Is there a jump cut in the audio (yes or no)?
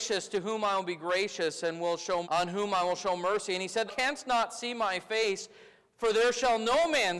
yes